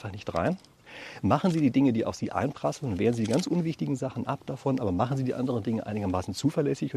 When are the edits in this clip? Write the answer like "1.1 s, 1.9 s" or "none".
none

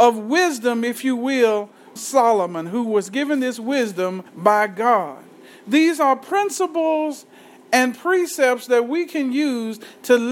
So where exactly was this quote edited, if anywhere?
2.0 s, 4.3 s

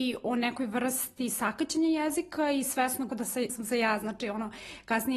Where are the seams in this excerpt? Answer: 3.1 s, 3.5 s

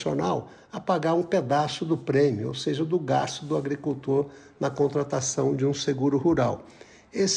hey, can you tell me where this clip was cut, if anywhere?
none

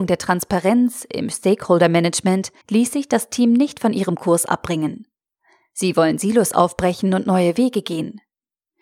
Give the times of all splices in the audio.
2.6 s

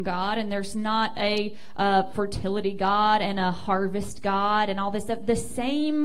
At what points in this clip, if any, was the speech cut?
none

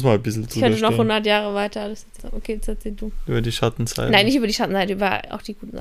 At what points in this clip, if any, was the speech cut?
2.2 s

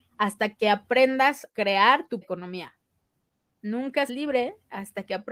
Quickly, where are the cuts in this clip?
1.5 s, 2.2 s, 4.1 s

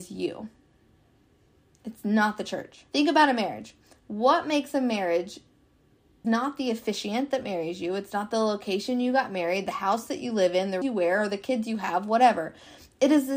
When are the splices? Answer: 2.9 s, 6.2 s, 10.8 s

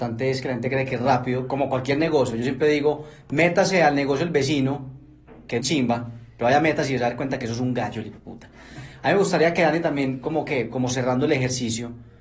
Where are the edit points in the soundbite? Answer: 5.6 s

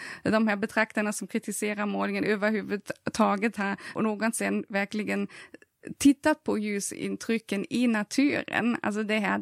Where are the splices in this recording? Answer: 4.0 s

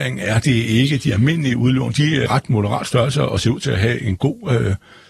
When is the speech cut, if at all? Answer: 2.3 s

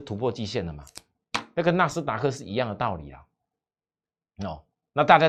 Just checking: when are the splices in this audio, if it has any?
none

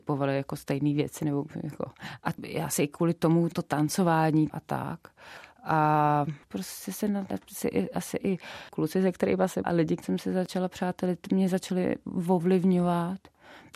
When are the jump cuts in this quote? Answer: 3.5 s, 4.5 s, 7.3 s, 9.6 s, 10.0 s

